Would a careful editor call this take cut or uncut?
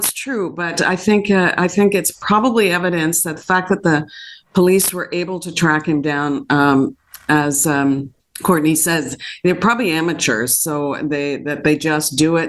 cut